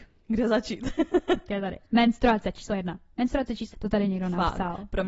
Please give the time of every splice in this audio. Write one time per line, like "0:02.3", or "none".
0:01.5
0:03.7